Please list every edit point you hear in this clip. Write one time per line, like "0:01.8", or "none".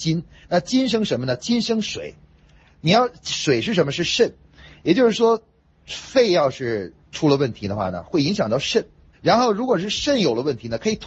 0:09.1